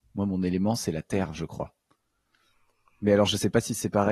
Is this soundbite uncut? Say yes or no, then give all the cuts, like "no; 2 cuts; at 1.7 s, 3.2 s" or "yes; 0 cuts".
yes; 0 cuts